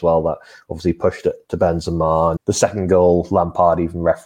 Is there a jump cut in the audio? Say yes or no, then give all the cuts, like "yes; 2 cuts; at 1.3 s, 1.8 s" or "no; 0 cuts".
yes; 1 cut; at 2.4 s